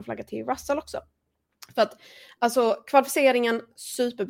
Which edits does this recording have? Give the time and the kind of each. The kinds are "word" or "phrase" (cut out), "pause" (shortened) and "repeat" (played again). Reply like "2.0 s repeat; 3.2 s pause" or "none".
none